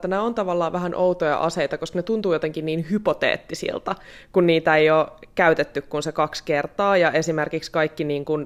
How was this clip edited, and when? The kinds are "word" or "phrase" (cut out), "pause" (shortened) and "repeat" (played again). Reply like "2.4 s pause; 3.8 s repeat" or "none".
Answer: none